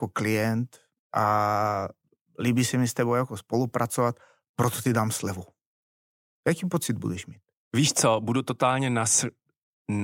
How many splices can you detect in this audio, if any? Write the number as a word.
zero